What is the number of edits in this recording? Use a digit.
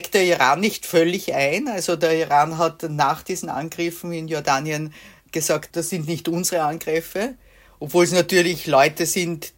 0